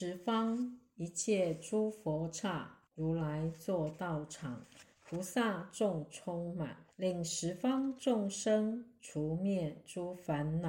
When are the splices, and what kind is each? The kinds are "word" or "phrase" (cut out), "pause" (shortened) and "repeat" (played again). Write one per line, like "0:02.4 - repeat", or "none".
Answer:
0:02.8 - pause
0:04.9 - pause
0:06.9 - pause